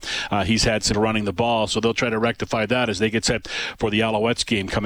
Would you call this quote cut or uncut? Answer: cut